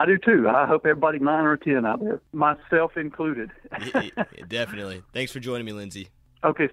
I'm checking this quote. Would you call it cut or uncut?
cut